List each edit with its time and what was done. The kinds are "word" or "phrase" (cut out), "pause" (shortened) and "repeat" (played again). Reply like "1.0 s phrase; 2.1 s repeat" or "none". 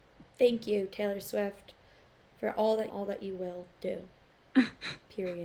2.9 s phrase